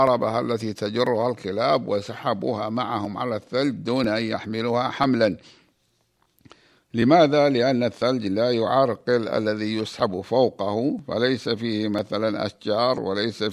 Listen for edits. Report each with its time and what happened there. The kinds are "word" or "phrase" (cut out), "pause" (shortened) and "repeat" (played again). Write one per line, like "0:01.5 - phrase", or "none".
none